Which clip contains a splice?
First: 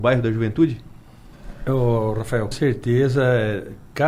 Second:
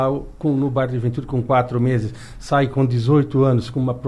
first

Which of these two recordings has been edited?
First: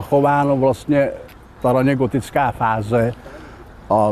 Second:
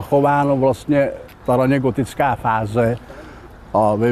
second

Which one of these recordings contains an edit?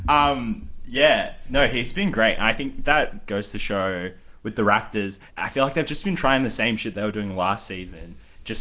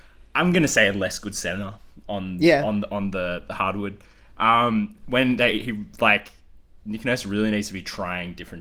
first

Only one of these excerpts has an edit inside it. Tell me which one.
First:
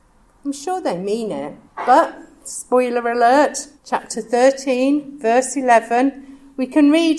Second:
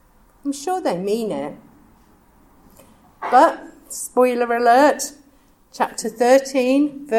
first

